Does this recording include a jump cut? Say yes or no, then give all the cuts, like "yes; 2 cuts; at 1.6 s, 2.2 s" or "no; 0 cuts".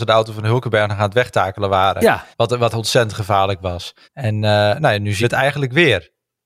yes; 3 cuts; at 2.3 s, 4.0 s, 5.2 s